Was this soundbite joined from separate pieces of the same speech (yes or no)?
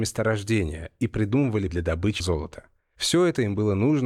yes